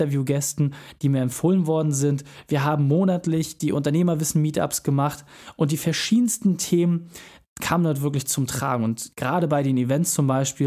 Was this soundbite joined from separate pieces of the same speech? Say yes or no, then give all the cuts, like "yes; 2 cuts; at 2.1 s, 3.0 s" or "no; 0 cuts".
no; 0 cuts